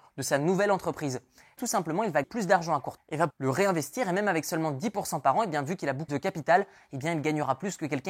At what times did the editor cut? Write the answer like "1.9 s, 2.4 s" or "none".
1.6 s, 2.2 s, 3.0 s, 3.3 s, 6.1 s